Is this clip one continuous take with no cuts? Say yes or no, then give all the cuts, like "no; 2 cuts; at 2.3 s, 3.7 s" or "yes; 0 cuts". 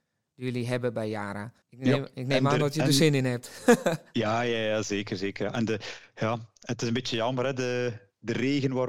no; 1 cut; at 1.6 s